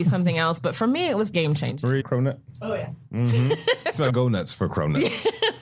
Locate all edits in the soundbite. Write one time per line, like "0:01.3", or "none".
0:01.3
0:02.0
0:04.1